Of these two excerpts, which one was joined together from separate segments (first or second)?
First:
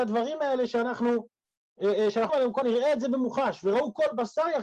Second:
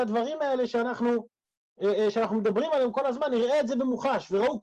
first